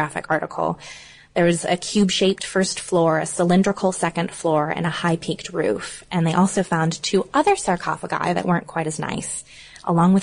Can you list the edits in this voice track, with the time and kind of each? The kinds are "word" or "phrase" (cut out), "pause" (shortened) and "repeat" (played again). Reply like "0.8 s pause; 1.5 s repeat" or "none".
none